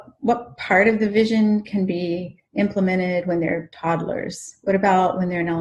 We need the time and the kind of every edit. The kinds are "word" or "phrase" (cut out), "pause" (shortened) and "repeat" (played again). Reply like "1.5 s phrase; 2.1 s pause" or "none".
2.4 s pause